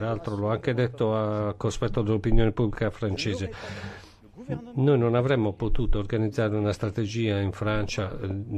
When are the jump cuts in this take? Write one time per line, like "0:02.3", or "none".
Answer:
none